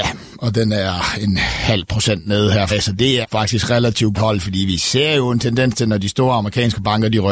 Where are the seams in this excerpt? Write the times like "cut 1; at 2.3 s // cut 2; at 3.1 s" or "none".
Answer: cut 1; at 2.7 s // cut 2; at 3.2 s // cut 3; at 4.1 s

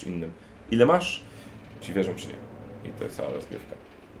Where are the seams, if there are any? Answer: cut 1; at 1.8 s // cut 2; at 3.1 s

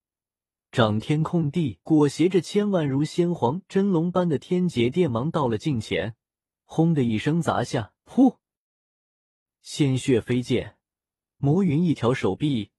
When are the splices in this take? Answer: cut 1; at 1.8 s // cut 2; at 8.0 s

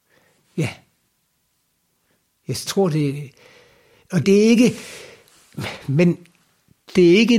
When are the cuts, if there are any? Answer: cut 1; at 2.7 s // cut 2; at 4.2 s

